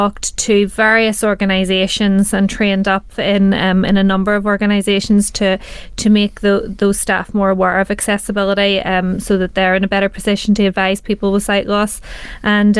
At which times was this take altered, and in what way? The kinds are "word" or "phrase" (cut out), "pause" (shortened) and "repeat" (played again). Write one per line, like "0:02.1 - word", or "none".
0:03.1 - word